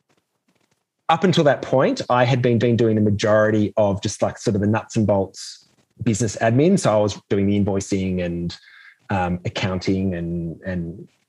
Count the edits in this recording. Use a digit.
1